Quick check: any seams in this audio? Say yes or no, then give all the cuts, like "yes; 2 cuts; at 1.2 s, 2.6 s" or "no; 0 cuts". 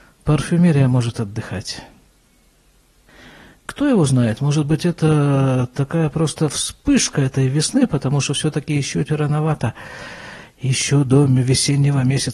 yes; 1 cut; at 9.1 s